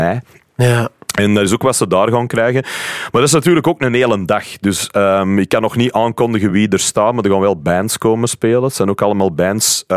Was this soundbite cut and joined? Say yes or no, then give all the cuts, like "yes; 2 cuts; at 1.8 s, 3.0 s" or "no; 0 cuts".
no; 0 cuts